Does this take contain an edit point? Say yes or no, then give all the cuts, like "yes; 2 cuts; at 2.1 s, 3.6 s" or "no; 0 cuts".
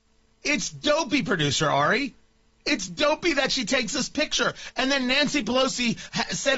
no; 0 cuts